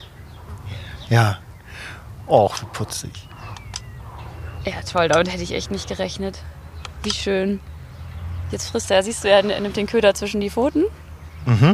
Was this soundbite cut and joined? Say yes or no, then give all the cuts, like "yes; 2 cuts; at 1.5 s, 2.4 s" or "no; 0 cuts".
no; 0 cuts